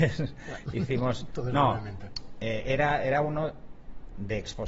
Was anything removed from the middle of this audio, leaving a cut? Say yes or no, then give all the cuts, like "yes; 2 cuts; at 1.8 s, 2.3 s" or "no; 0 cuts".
no; 0 cuts